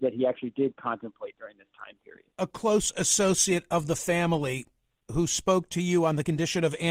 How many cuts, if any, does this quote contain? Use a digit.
1